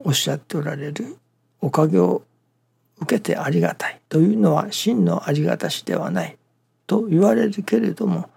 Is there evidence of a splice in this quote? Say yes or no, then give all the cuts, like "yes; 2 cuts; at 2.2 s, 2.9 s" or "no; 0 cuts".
yes; 1 cut; at 4.0 s